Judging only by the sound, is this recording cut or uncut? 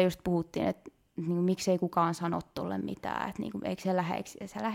uncut